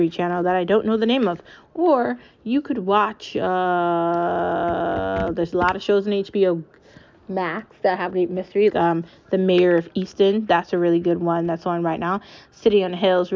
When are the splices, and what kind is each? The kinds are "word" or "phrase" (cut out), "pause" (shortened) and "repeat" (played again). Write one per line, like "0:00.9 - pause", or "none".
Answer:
0:08.1 - word
0:08.7 - word